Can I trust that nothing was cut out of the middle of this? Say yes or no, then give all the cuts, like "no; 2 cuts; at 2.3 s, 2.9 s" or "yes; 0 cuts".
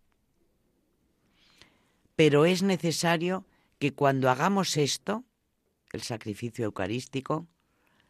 yes; 0 cuts